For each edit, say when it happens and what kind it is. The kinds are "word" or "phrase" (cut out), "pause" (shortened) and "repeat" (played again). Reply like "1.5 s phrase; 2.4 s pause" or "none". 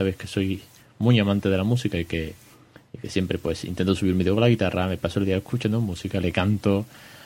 none